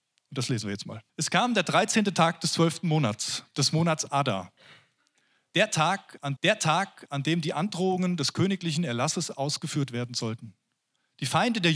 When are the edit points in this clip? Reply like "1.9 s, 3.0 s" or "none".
1.1 s, 6.4 s